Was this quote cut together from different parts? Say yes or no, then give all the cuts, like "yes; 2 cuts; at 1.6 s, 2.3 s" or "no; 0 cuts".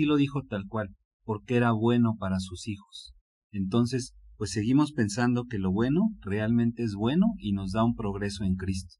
no; 0 cuts